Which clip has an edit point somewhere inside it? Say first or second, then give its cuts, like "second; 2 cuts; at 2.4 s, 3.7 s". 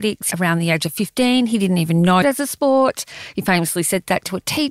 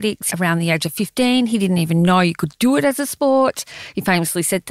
first; 1 cut; at 2.2 s